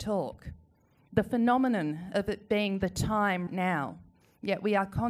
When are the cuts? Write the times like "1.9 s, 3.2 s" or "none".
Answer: 3.5 s

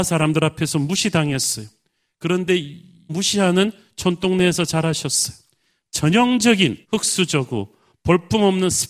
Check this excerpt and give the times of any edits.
3.1 s, 6.8 s

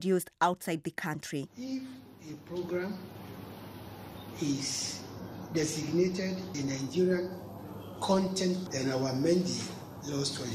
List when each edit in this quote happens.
6.5 s, 8.7 s

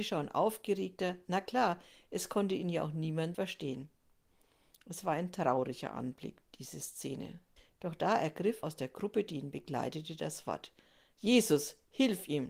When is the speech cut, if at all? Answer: 3.3 s, 7.6 s, 8.6 s

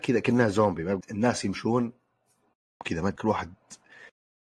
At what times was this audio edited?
1.0 s, 2.8 s, 3.2 s

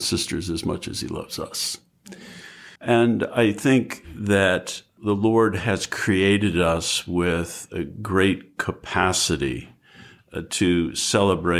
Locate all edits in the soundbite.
2.8 s

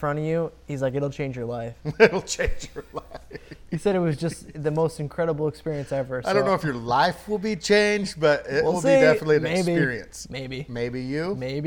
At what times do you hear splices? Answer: none

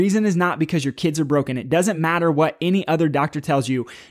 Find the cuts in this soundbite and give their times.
none

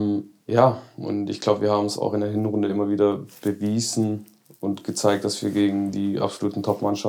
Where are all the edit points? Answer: none

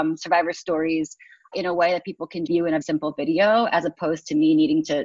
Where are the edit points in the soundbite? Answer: 1.5 s, 2.5 s, 2.8 s

